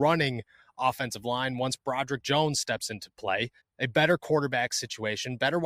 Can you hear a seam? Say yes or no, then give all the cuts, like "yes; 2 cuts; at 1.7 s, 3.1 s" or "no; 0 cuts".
yes; 1 cut; at 3.6 s